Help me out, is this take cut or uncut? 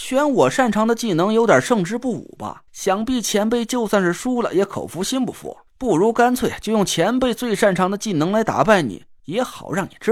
cut